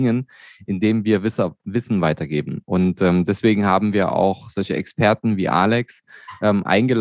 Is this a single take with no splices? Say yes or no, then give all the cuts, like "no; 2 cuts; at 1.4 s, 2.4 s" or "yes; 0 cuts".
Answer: yes; 0 cuts